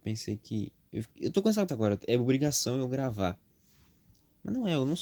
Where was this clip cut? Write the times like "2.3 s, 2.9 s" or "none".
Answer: 1.1 s, 1.7 s